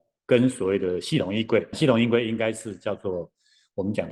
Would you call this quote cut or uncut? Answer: cut